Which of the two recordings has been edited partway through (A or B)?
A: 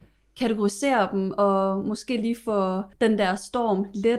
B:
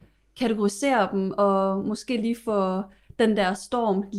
A